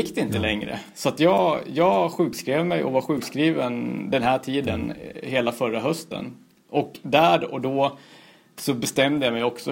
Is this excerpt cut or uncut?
uncut